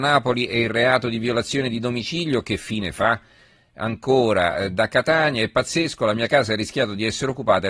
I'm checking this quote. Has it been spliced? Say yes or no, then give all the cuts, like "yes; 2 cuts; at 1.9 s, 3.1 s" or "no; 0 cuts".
no; 0 cuts